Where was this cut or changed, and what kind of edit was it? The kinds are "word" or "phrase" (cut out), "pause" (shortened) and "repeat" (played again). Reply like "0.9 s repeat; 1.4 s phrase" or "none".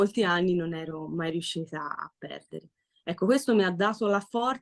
none